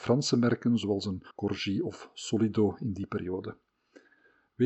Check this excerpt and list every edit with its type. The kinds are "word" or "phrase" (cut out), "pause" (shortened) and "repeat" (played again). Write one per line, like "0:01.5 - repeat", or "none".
0:01.3 - pause